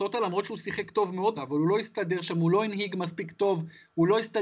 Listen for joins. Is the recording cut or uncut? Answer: cut